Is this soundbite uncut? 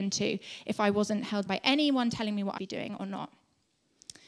no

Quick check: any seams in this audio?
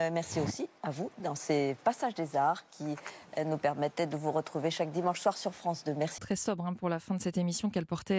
yes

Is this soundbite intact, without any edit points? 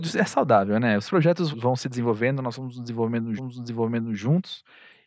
no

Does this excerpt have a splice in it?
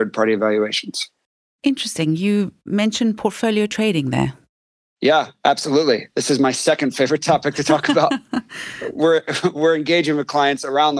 no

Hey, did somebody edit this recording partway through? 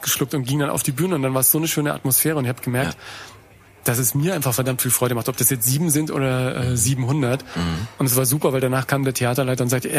no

